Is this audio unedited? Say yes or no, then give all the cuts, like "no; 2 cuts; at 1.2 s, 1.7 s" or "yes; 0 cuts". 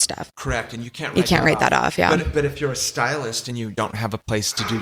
yes; 0 cuts